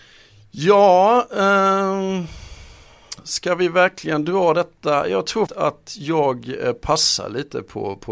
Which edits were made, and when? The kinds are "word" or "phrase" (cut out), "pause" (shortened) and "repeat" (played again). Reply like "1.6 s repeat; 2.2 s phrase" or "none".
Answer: 5.5 s word